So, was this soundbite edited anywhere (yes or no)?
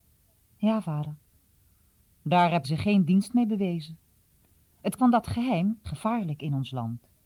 yes